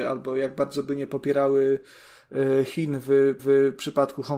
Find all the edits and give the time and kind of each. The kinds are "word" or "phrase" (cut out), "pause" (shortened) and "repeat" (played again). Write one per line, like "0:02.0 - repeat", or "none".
0:03.4 - repeat